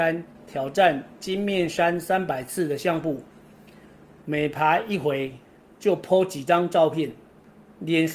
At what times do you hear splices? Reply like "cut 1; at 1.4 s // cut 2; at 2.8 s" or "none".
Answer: none

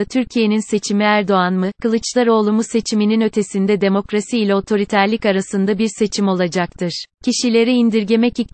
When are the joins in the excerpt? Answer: cut 1; at 7.1 s

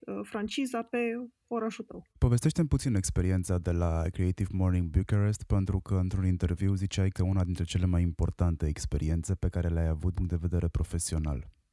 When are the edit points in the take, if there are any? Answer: cut 1; at 2.1 s // cut 2; at 7.1 s // cut 3; at 10.1 s

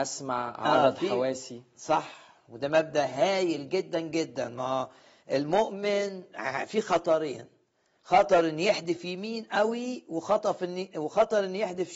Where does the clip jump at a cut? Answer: none

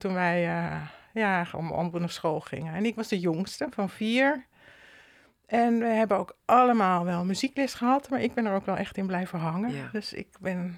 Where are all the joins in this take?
none

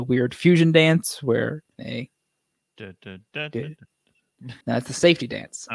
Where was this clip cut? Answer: cut 1; at 1.7 s // cut 2; at 4.6 s

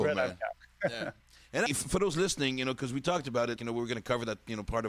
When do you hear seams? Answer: cut 1; at 1.7 s // cut 2; at 3.6 s

